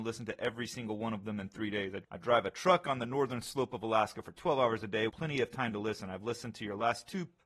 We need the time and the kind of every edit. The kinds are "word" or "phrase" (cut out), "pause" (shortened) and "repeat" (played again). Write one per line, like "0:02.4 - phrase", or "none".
0:05.1 - word